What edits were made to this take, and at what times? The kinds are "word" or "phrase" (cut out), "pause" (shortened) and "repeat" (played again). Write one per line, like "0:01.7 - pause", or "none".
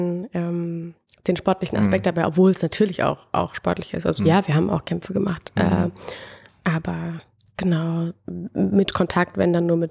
none